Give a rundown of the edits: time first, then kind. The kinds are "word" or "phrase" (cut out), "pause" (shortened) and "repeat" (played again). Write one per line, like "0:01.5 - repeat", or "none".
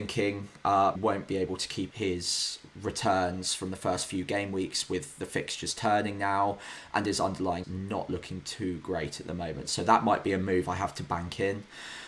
0:01.0 - word
0:01.9 - word
0:07.6 - word